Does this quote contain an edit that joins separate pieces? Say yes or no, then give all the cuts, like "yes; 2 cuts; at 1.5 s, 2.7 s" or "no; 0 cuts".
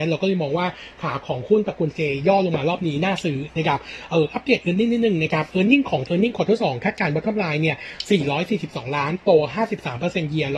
yes; 1 cut; at 6.1 s